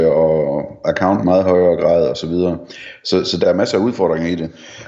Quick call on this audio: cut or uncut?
cut